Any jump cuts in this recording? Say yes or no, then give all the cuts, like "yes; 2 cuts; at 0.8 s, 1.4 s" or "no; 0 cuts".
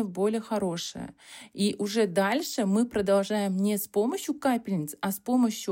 no; 0 cuts